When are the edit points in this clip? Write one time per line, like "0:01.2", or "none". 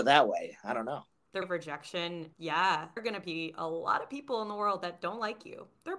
0:01.4
0:02.3
0:03.0